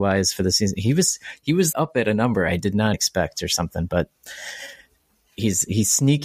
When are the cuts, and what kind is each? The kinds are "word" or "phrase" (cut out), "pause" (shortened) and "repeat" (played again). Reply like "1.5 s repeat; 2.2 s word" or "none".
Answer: 1.7 s word; 2.9 s word